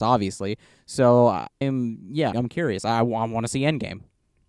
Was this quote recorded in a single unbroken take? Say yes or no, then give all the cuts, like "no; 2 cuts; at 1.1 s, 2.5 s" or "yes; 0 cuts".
no; 2 cuts; at 1.6 s, 2.3 s